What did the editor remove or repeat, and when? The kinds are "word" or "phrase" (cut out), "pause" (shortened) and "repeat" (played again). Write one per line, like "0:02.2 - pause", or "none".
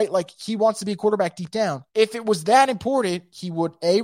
0:01.9 - pause